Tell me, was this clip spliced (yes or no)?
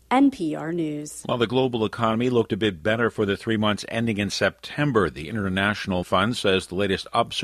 yes